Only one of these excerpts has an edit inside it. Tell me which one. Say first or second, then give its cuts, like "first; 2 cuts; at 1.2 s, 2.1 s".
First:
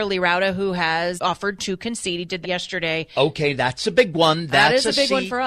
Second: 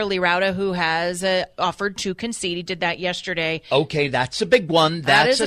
first; 2 cuts; at 1.2 s, 2.4 s